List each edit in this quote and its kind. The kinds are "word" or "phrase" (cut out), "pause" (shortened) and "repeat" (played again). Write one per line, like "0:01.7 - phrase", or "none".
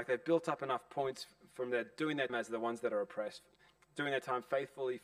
0:02.3 - word